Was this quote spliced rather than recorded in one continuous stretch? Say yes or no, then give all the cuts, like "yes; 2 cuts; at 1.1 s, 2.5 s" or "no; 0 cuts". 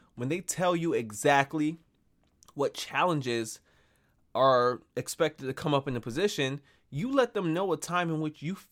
no; 0 cuts